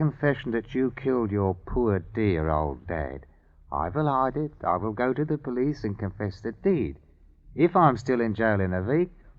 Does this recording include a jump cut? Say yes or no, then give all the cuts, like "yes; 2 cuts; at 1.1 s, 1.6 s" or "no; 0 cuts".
no; 0 cuts